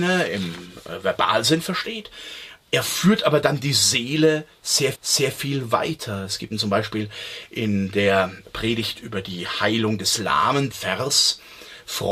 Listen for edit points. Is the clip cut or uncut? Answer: cut